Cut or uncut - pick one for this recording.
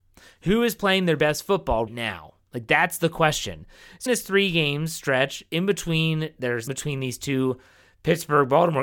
cut